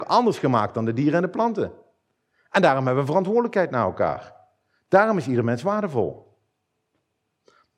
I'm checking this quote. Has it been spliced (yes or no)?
no